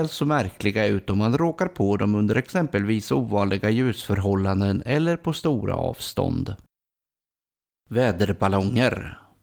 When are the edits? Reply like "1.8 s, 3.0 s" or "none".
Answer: none